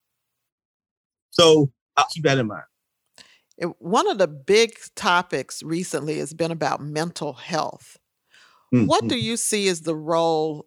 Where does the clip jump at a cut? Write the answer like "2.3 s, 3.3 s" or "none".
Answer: 2.1 s